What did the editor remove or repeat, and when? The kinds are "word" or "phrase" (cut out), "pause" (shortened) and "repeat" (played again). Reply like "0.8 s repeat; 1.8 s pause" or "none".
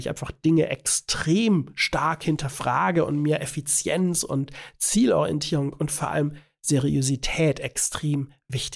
none

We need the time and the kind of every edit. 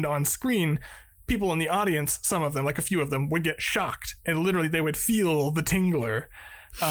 none

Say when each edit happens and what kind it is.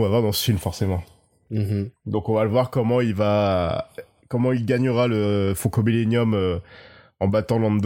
none

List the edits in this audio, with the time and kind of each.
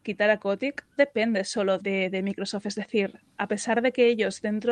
1.0 s word; 1.8 s word

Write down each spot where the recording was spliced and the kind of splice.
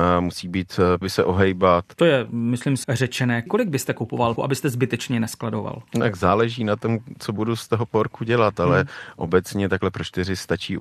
1.0 s phrase; 2.8 s word; 4.4 s word

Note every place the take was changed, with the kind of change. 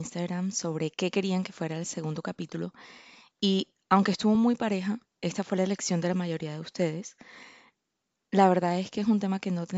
none

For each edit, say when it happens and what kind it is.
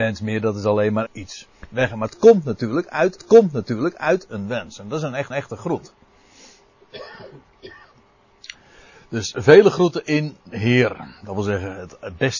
1.1 s word; 3.2 s repeat; 5.3 s repeat; 10.4 s pause

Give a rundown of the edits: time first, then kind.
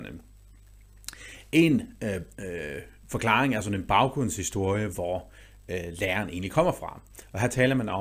none

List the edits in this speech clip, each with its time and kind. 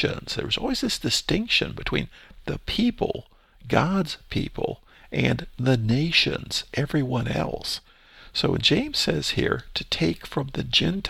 none

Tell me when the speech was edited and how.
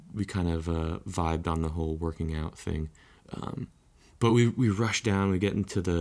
none

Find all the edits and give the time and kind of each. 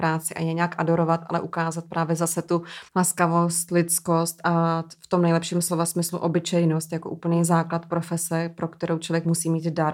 2.9 s pause

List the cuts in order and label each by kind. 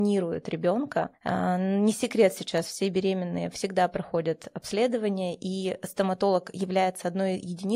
none

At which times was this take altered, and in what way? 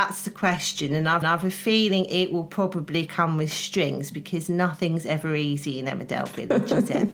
1.2 s repeat

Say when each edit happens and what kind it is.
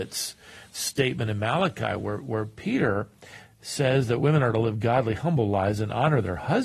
none

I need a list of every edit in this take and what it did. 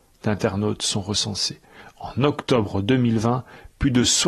none

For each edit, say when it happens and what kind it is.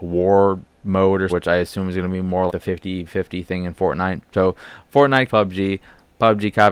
1.3 s word; 2.5 s word; 3.1 s word; 5.3 s word

